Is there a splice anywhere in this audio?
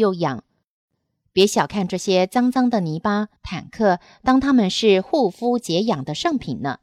yes; 1 cut; at 3.4 s

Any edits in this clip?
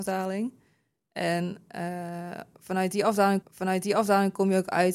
yes; 1 cut; at 3.4 s

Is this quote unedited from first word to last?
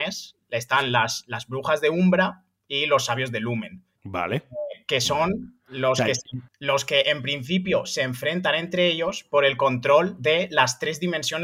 no; 2 cuts; at 4.0 s, 6.5 s

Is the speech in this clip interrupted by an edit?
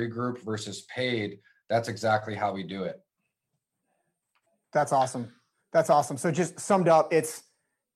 no; 0 cuts

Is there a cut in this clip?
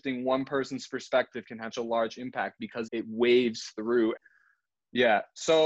yes; 3 cuts; at 1.7 s, 2.9 s, 4.2 s

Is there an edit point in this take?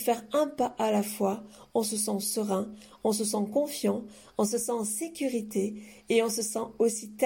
no; 0 cuts

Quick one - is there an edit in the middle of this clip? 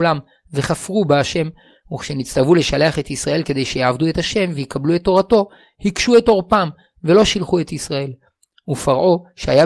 no; 0 cuts

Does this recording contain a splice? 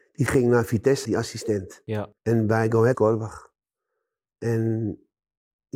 yes; 3 cuts; at 1.0 s, 2.2 s, 2.9 s

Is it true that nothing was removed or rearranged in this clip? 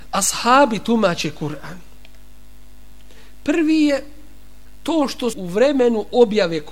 no; 1 cut; at 5.3 s

